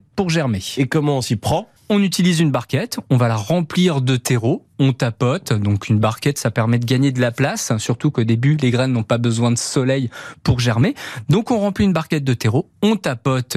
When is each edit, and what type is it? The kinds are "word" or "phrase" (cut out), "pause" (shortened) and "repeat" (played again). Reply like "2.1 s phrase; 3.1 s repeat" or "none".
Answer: 1.8 s pause